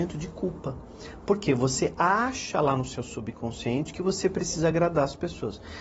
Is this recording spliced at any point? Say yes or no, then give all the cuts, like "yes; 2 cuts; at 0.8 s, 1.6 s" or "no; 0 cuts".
no; 0 cuts